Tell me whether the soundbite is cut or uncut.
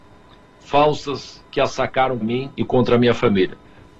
cut